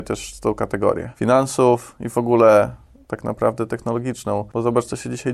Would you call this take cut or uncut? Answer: uncut